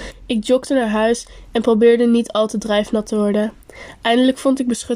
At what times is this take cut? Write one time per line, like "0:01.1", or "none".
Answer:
none